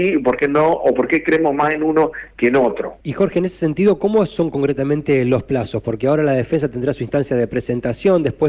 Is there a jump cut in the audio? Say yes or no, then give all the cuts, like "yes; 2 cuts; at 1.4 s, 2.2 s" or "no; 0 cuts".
yes; 1 cut; at 3.0 s